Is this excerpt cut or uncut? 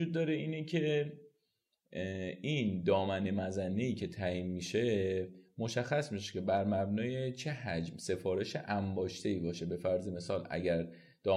uncut